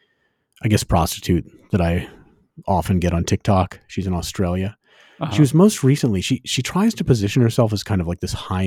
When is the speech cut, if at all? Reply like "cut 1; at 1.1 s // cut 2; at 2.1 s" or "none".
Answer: none